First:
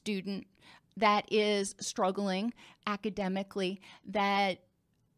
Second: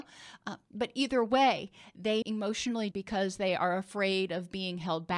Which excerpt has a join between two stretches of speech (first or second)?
second